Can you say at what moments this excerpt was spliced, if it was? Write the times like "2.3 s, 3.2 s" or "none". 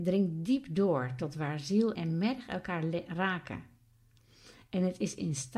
1.9 s